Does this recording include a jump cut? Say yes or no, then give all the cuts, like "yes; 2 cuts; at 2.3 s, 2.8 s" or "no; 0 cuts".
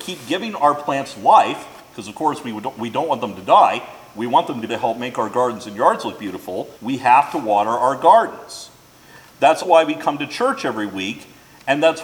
yes; 3 cuts; at 4.7 s, 6.8 s, 9.6 s